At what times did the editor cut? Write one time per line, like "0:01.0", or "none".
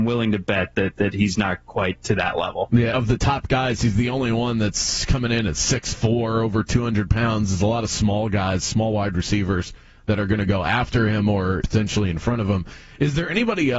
0:02.9
0:11.6